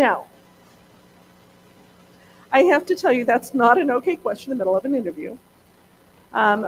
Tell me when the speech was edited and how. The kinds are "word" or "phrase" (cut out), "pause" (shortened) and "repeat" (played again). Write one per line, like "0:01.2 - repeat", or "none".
0:03.3 - word
0:04.5 - phrase